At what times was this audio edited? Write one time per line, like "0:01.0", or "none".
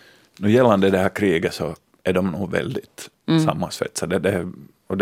none